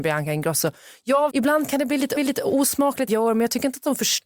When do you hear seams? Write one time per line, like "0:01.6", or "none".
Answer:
0:01.3
0:02.2
0:03.1